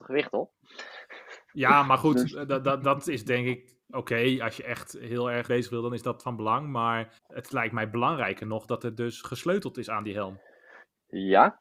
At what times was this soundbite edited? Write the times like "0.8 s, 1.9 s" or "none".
3.8 s, 5.5 s, 7.2 s

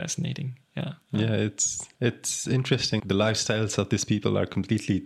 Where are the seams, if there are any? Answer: 1.0 s, 1.9 s, 3.0 s

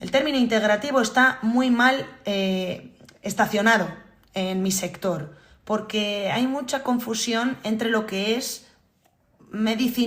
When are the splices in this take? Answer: none

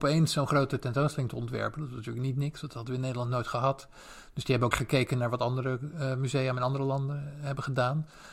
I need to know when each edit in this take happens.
4.7 s

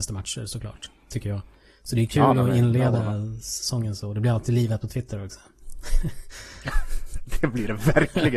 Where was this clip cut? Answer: none

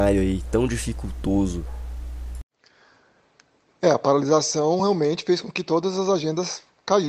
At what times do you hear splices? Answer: none

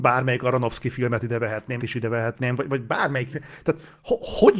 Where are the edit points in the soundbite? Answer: 1.8 s, 3.3 s

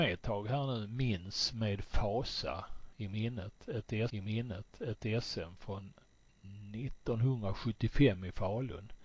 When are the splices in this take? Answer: 4.1 s

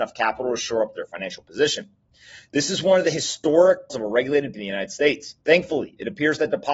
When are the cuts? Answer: 3.9 s, 4.5 s, 5.4 s

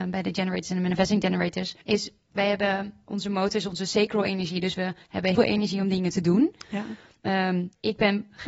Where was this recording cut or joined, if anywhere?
1.8 s, 3.0 s, 5.4 s

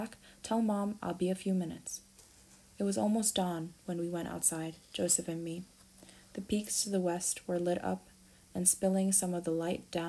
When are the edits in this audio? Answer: none

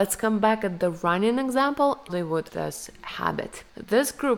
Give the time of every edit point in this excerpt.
2.1 s, 2.5 s

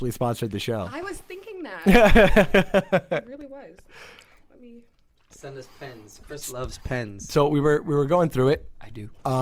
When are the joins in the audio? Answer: none

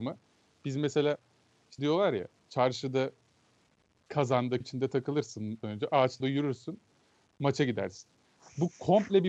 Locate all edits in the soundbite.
1.8 s, 4.6 s, 5.6 s, 6.2 s

